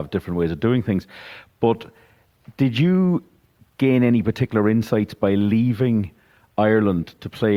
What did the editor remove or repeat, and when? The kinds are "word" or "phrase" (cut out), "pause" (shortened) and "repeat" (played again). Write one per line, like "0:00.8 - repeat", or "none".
none